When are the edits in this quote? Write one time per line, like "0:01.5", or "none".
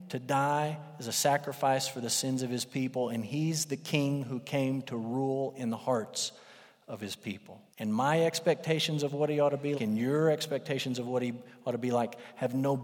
0:07.7
0:09.7